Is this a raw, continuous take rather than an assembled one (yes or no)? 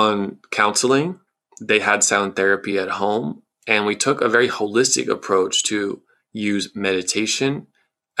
yes